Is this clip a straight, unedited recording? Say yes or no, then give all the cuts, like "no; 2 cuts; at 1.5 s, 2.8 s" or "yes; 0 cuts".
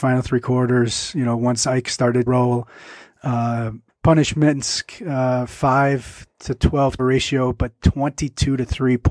no; 3 cuts; at 2.3 s, 3.9 s, 7.0 s